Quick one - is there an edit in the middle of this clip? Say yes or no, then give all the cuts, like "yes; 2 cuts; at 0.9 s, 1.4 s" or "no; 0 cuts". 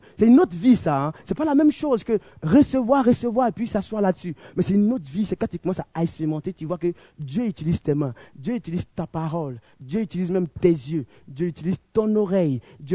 no; 0 cuts